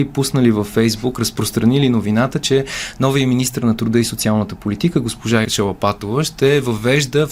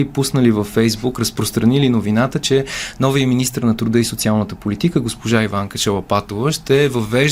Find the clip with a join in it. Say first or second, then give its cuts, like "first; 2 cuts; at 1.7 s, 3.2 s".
first; 1 cut; at 5.4 s